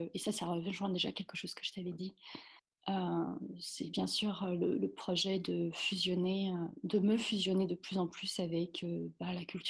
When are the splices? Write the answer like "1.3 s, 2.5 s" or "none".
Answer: 2.6 s